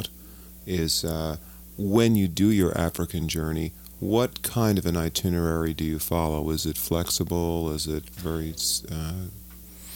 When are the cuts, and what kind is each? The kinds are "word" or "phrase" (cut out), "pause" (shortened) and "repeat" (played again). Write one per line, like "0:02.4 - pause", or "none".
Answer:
0:08.2 - word